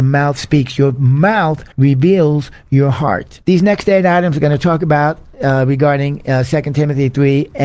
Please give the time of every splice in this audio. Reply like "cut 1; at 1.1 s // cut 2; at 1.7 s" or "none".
cut 1; at 1.7 s // cut 2; at 3.4 s